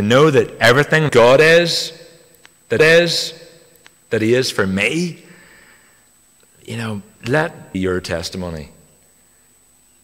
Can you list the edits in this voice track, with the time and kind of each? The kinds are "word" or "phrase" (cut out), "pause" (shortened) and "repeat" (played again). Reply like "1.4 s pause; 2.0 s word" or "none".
1.1 s word; 2.8 s repeat; 7.7 s phrase